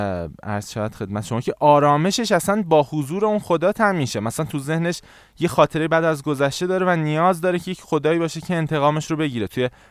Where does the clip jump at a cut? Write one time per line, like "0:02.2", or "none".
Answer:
none